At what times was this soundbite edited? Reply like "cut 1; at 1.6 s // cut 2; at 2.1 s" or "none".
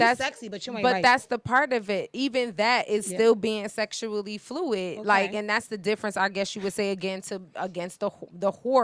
none